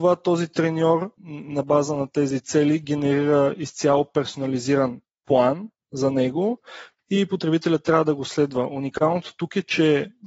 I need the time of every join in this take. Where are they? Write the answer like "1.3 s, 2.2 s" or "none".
1.2 s